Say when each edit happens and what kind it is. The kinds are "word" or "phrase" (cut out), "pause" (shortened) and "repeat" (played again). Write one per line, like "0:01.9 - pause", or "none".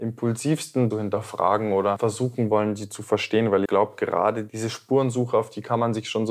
0:00.9 - phrase
0:03.7 - word